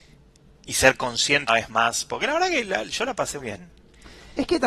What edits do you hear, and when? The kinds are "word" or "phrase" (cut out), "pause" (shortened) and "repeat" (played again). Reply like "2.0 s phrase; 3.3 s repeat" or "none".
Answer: 1.5 s word; 3.4 s word